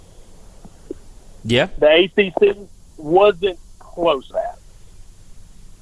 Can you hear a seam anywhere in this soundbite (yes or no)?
yes